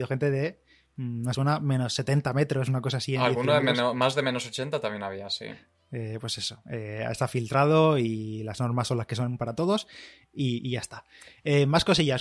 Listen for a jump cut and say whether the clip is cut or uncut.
cut